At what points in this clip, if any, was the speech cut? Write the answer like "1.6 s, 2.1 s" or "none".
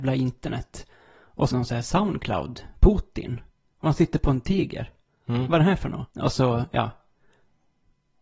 1.5 s, 2.7 s, 6.1 s